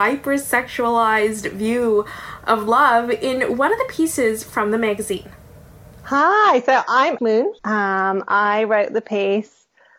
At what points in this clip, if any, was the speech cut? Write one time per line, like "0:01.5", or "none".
0:07.2
0:07.6